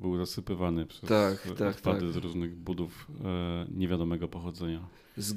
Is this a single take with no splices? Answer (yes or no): yes